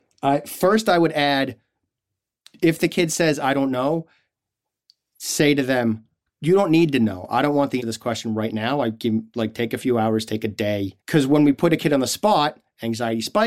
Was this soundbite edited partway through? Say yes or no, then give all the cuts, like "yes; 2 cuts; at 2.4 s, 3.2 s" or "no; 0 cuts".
yes; 2 cuts; at 7.8 s, 11.0 s